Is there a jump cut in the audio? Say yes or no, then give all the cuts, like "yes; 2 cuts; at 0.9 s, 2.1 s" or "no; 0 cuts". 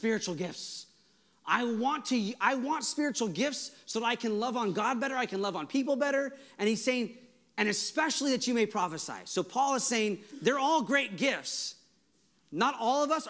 no; 0 cuts